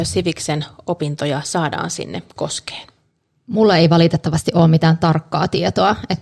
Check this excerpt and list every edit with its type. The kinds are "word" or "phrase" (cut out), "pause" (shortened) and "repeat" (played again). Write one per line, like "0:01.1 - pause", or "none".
none